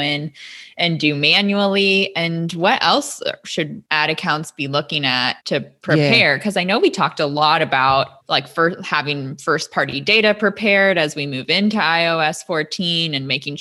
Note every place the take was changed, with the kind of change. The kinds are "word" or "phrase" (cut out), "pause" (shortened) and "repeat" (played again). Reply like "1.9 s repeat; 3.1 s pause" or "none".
5.4 s pause